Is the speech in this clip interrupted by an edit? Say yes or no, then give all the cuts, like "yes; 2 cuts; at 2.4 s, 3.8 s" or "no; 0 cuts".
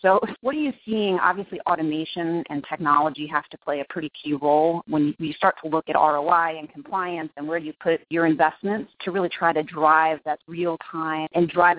no; 0 cuts